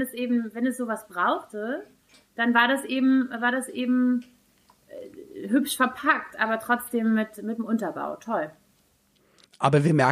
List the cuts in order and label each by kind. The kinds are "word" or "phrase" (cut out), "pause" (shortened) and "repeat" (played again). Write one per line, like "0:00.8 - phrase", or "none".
none

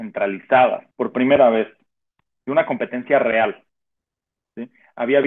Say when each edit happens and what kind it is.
0:00.9 - pause

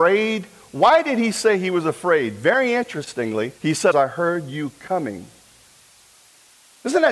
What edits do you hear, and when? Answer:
0:03.6 - pause
0:03.9 - phrase

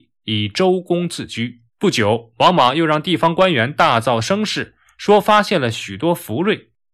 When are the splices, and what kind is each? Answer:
0:01.7 - pause

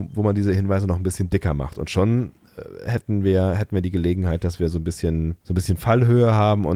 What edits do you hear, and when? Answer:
0:05.4 - pause

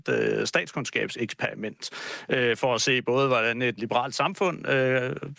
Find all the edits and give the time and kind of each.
0:03.8 - word

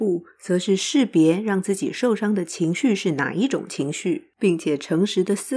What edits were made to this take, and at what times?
0:04.3 - pause

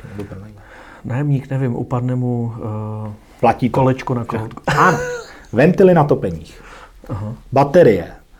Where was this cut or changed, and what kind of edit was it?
0:01.0 - pause

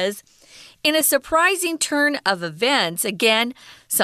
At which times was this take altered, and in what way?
none

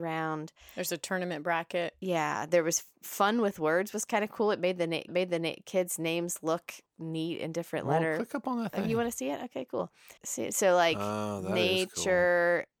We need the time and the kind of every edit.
0:05.1 - repeat
0:06.9 - pause
0:10.2 - pause

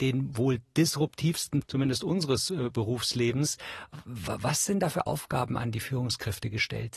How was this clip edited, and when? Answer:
0:01.6 - word

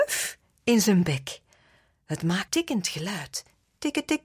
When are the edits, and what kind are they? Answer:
0:02.5 - word

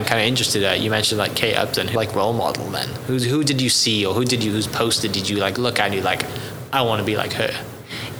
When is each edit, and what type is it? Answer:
0:02.0 - phrase

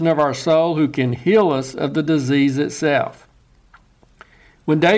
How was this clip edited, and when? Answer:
none

